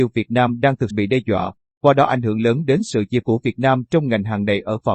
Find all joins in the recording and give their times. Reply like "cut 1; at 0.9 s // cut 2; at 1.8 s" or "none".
cut 1; at 0.9 s // cut 2; at 3.2 s